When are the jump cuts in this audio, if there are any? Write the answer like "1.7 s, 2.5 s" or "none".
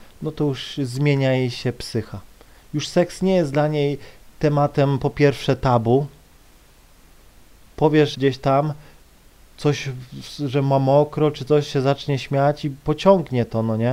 8.1 s